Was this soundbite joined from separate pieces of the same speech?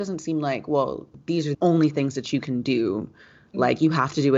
yes; 1 cut; at 1.5 s

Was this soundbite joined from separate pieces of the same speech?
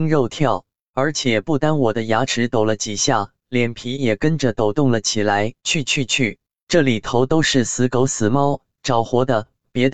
yes; 1 cut; at 5.6 s

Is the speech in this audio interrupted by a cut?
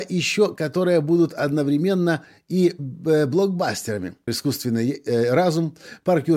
yes; 1 cut; at 4.3 s

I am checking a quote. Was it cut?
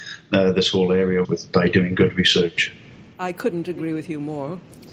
yes; 1 cut; at 1.2 s

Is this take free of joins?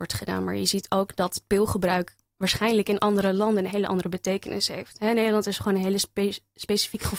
yes; 0 cuts

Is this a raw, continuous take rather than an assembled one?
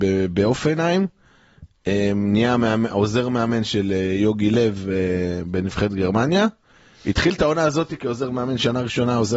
yes; 0 cuts

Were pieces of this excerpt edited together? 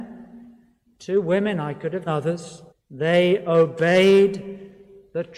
yes; 2 cuts; at 2.1 s, 2.7 s

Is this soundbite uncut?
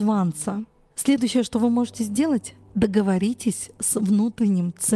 yes; 0 cuts

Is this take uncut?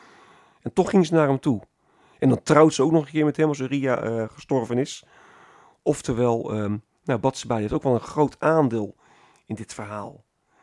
yes; 0 cuts

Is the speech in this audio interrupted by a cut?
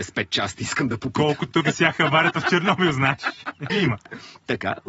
yes; 2 cuts; at 1.6 s, 3.7 s

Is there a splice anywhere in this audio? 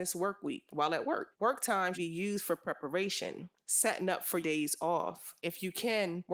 yes; 4 cuts; at 1.3 s, 1.9 s, 4.4 s, 5.4 s

